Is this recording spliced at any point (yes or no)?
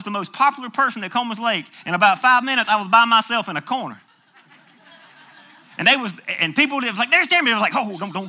no